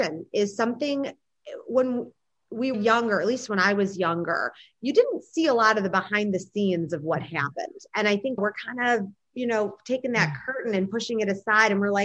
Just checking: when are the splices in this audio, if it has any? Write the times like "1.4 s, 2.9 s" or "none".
2.7 s, 8.4 s